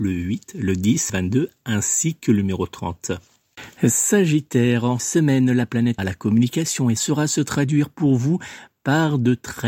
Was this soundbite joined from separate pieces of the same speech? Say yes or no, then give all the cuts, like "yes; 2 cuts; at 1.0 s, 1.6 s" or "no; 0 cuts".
yes; 4 cuts; at 1.1 s, 5.0 s, 6.0 s, 7.0 s